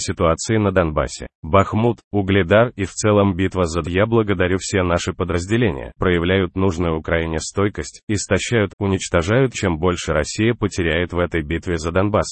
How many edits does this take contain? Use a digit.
5